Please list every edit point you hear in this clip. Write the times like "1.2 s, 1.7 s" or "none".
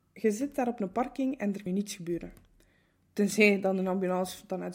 1.7 s